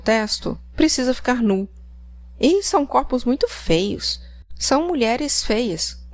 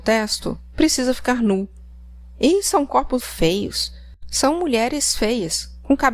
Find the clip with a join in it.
second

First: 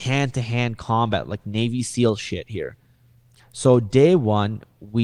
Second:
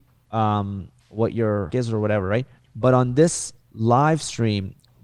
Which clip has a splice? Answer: second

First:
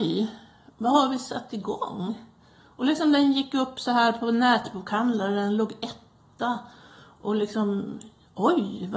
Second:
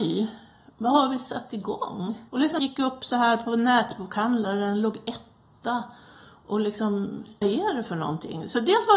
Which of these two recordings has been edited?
second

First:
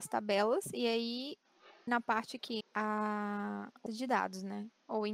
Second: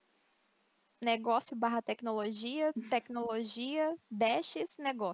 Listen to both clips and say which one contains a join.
first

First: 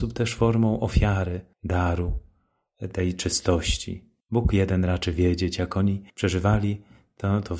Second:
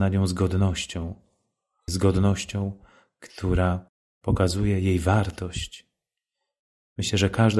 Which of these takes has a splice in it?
first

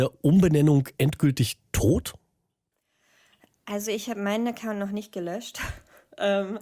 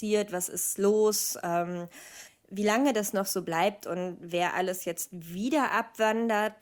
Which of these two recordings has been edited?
second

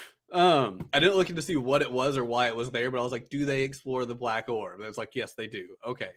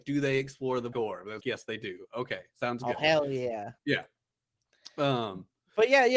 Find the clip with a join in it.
second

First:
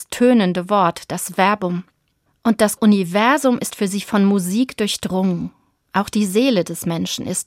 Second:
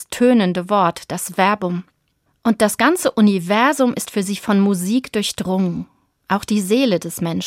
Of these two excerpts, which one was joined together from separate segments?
first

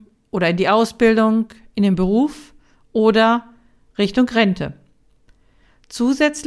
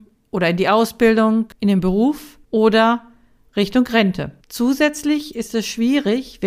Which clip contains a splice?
second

